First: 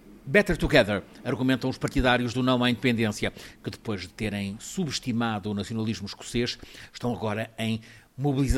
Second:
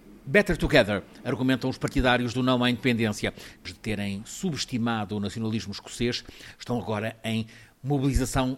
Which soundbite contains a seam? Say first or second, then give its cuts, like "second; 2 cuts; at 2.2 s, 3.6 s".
second; 1 cut; at 3.6 s